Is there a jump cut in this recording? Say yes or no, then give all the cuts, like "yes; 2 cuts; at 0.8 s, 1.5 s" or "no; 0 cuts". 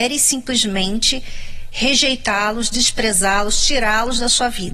no; 0 cuts